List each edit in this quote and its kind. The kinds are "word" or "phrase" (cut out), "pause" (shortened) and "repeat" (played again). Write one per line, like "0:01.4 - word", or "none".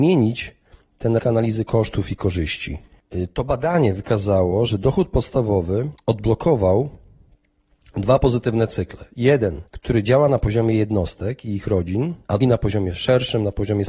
0:01.2 - word
0:06.0 - pause
0:09.7 - pause
0:12.4 - word